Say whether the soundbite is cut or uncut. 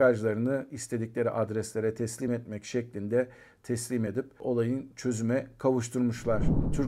uncut